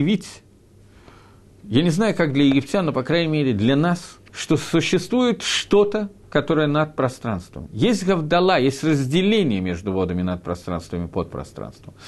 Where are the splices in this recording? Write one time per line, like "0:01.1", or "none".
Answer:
0:04.3